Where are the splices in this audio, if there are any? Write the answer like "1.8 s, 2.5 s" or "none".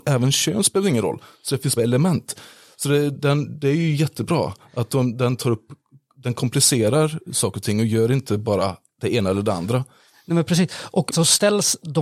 1.8 s, 3.1 s, 11.1 s